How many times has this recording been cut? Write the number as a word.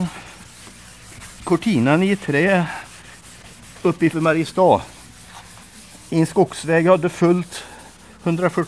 one